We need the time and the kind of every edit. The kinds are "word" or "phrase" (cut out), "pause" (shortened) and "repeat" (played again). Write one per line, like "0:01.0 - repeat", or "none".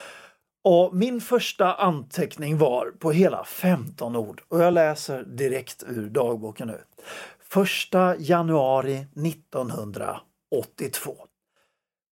none